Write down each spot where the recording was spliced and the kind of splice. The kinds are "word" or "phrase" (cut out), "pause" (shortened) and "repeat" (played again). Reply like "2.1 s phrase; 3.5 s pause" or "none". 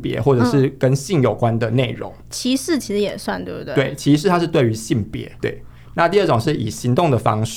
5.4 s word